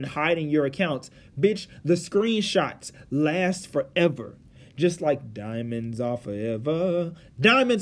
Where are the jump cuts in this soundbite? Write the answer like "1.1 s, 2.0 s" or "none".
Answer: none